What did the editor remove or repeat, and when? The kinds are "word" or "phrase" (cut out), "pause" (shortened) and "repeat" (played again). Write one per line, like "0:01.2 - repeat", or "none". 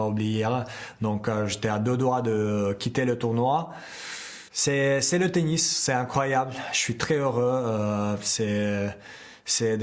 0:04.5 - pause